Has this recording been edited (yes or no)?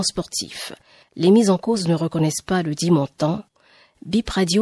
no